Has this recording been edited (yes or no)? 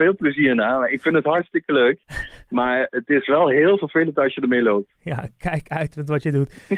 no